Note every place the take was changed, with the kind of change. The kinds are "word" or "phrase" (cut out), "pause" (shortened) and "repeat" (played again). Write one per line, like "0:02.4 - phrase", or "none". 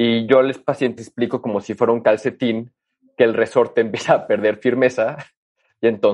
0:01.0 - word